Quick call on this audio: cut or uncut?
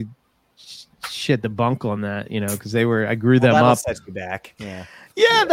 uncut